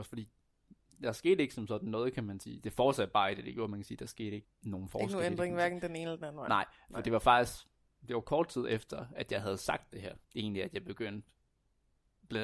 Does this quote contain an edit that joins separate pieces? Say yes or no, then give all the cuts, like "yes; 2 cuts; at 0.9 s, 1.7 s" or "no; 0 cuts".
yes; 2 cuts; at 4.4 s, 10.2 s